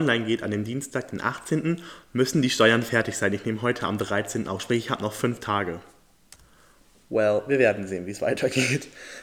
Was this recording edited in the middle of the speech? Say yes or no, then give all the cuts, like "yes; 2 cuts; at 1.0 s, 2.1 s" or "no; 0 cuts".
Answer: no; 0 cuts